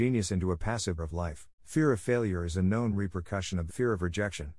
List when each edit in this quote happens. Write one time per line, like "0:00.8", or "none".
0:01.0
0:01.6
0:03.7